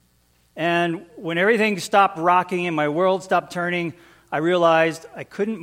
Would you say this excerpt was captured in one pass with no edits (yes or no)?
yes